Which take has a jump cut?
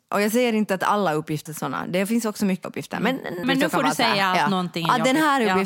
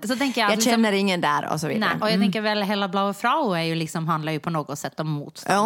first; 3 cuts; at 1.5 s, 2.6 s, 3.4 s

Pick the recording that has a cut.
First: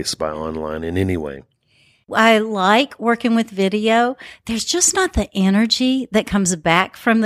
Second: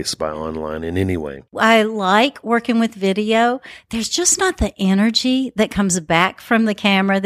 second; 1 cut; at 1.5 s

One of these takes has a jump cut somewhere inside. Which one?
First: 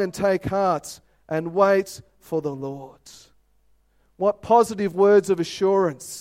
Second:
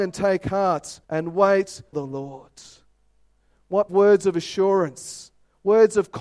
second; 3 cuts; at 1.0 s, 1.9 s, 3.9 s

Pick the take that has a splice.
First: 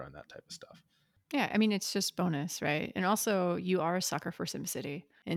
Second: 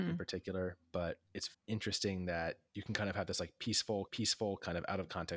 second; 2 cuts; at 1.5 s, 4.1 s

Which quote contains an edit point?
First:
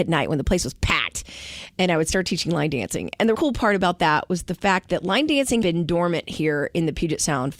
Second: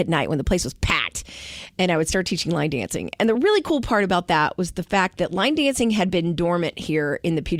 first; 2 cuts; at 3.3 s, 5.6 s

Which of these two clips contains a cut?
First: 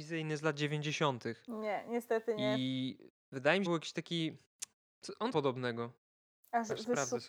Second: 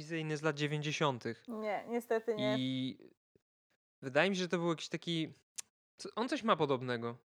first; 3 cuts; at 3.1 s, 3.7 s, 5.3 s

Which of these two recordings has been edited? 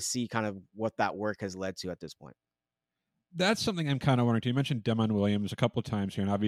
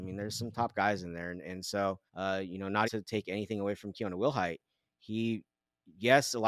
second; 2 cuts; at 2.1 s, 2.8 s

